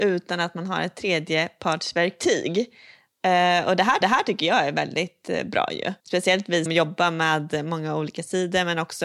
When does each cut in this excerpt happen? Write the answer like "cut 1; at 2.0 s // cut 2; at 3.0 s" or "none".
cut 1; at 4.0 s // cut 2; at 6.0 s // cut 3; at 6.7 s